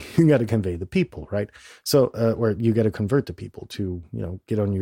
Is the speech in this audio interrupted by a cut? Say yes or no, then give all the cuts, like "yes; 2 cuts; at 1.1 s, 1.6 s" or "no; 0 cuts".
no; 0 cuts